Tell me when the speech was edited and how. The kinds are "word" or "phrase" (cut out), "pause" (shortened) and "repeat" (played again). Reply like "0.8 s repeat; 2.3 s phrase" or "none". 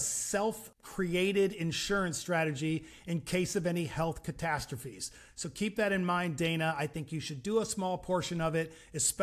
none